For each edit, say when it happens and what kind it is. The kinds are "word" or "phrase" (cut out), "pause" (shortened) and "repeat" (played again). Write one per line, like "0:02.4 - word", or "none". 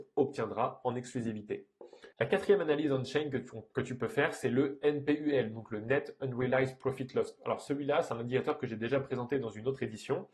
0:02.1 - pause